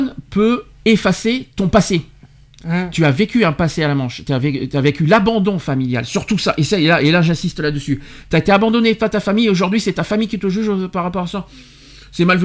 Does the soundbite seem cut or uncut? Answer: uncut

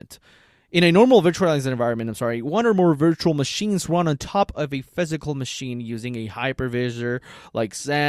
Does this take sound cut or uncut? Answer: uncut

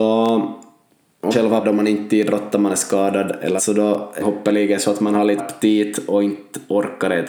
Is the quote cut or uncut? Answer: cut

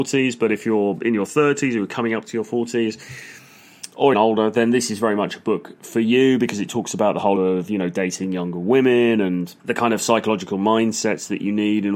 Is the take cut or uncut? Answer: cut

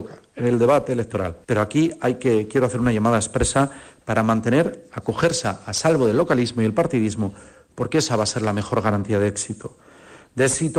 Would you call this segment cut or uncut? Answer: cut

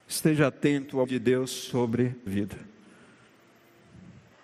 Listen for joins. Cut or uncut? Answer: cut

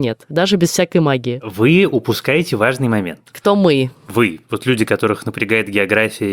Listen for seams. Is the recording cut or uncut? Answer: uncut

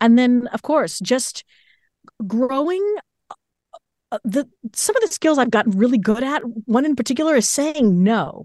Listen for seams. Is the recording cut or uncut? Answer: uncut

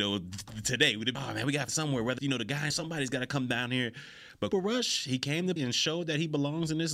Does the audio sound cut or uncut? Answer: cut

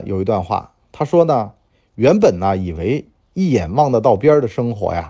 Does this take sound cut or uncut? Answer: uncut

